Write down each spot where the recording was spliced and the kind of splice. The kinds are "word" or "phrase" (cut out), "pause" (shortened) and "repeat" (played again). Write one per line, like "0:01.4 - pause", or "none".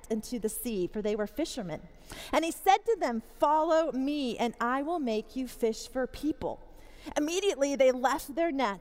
none

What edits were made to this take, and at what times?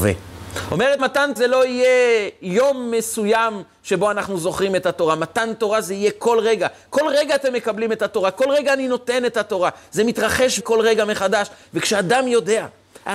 0:01.0 - word
0:01.4 - word
0:10.6 - word

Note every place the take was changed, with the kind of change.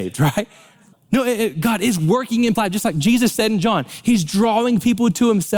0:00.9 - pause
0:02.6 - word

